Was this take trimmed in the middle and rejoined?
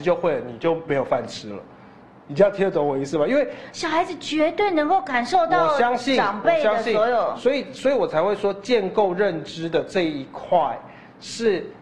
no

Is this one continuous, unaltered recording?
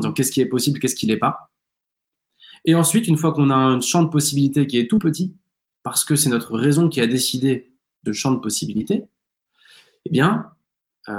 no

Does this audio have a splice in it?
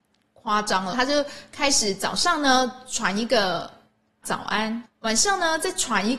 yes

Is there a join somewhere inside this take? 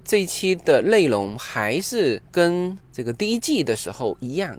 yes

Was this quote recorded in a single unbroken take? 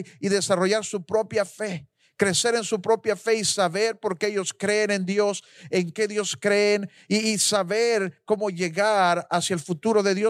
yes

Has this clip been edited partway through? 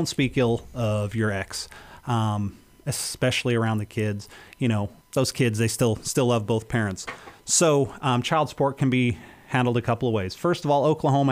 no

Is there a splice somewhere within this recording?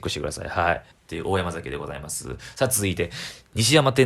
yes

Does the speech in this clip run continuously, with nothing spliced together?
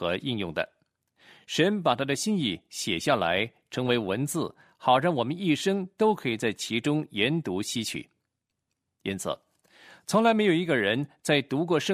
yes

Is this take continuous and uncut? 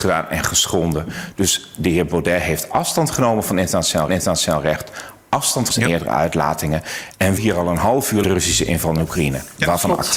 no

